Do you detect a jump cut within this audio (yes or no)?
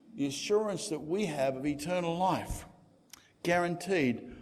no